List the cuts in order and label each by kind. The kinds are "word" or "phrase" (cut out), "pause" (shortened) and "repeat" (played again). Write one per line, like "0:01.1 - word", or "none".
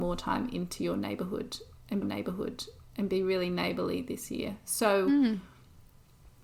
0:02.0 - repeat